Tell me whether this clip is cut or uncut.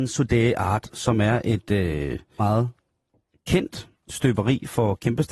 cut